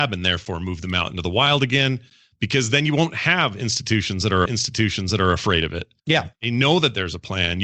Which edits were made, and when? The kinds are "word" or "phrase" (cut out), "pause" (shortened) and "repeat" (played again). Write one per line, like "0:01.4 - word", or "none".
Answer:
0:04.5 - repeat
0:06.0 - pause